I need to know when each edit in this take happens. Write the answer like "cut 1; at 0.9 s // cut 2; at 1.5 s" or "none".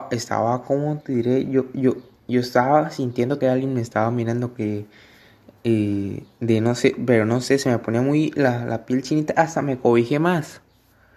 cut 1; at 3.4 s